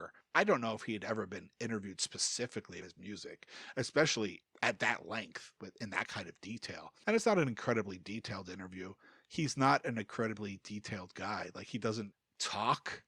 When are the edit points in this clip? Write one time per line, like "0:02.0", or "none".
0:02.8